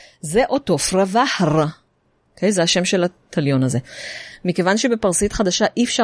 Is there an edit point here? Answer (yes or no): no